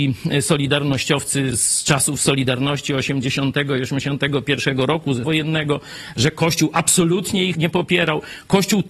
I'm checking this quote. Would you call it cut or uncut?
cut